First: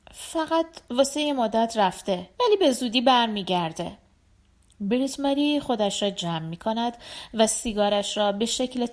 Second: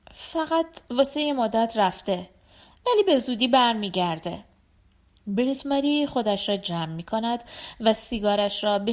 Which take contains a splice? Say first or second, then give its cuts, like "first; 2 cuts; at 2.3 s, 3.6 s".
first; 1 cut; at 2.3 s